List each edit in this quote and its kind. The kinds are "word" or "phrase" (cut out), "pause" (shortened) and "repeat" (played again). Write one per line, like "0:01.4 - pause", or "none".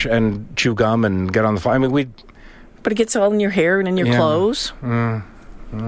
0:02.7 - pause